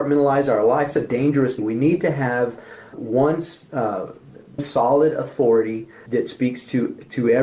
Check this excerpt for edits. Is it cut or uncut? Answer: cut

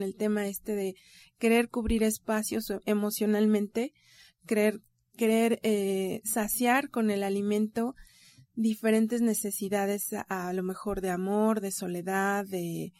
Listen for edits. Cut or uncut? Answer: uncut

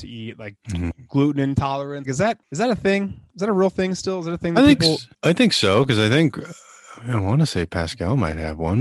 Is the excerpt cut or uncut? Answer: cut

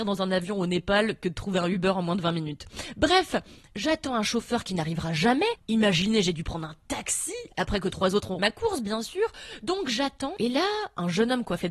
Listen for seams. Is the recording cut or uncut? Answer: cut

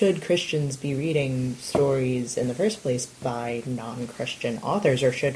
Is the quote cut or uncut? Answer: uncut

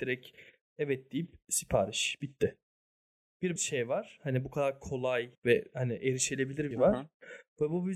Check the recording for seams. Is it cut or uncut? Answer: cut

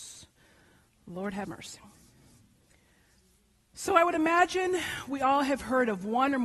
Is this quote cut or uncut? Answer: uncut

